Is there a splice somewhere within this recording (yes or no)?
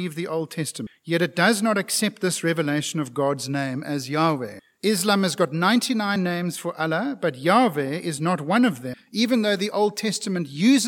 no